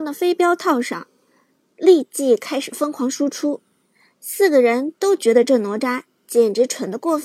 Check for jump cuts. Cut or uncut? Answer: uncut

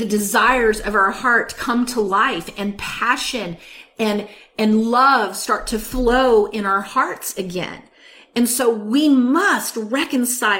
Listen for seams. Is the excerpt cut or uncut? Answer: uncut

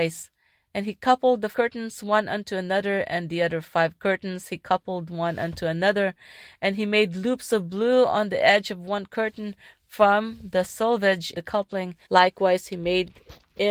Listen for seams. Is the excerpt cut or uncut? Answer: cut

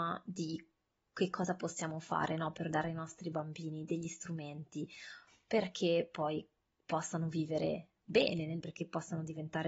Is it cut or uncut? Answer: cut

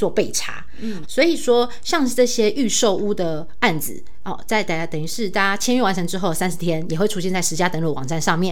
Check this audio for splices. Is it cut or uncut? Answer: cut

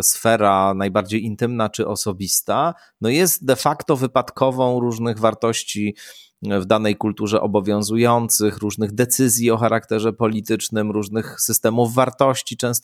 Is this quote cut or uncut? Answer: uncut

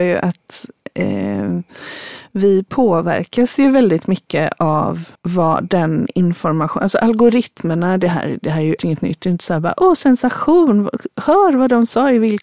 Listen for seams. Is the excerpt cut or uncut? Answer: cut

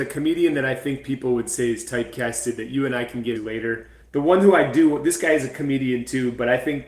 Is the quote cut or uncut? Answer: cut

